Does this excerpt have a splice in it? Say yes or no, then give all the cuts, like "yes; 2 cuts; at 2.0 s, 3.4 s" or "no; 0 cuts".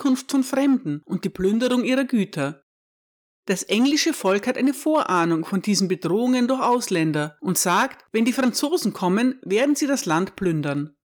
no; 0 cuts